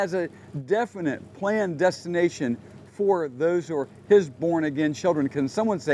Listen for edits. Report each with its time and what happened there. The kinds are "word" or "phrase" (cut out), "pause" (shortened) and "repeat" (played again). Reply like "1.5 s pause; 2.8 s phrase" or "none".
none